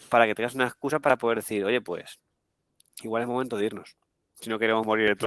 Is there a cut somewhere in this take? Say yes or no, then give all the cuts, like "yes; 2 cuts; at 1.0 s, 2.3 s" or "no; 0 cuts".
no; 0 cuts